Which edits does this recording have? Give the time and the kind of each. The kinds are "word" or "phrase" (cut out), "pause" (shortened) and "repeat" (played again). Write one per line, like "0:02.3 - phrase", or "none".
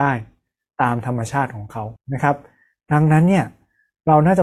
0:02.0 - pause